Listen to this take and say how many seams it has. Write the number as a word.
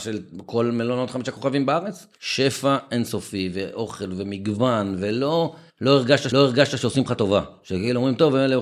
three